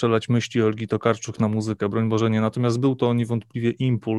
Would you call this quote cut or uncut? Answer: uncut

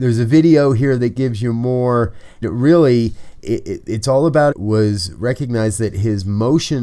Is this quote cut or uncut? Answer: cut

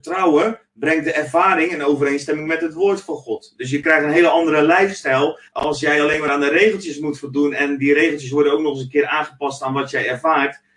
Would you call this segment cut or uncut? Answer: cut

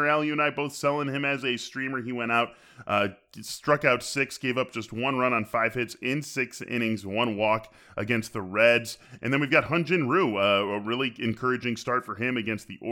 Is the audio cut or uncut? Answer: uncut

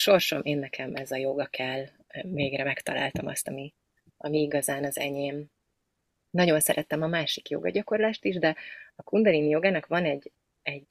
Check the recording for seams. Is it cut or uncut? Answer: uncut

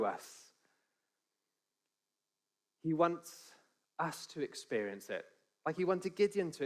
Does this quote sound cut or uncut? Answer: uncut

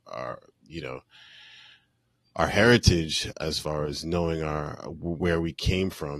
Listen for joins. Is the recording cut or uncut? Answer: uncut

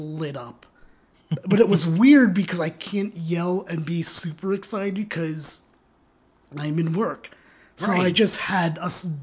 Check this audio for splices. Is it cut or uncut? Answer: uncut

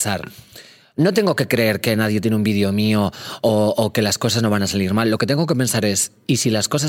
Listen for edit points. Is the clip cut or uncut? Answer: uncut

